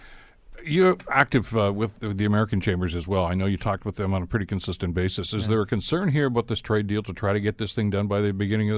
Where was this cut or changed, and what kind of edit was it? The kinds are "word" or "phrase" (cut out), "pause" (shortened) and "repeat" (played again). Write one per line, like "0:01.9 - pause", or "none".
none